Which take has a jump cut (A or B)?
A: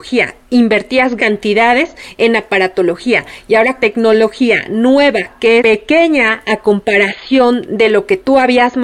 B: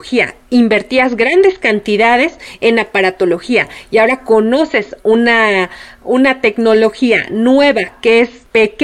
A